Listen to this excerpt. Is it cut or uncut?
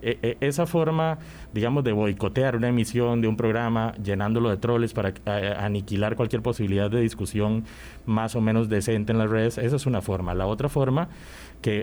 uncut